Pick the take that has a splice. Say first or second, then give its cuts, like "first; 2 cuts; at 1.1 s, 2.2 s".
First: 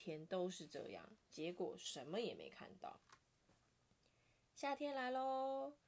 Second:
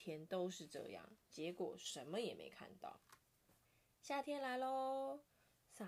second; 1 cut; at 3.6 s